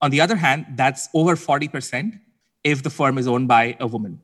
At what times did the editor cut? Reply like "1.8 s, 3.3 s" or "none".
none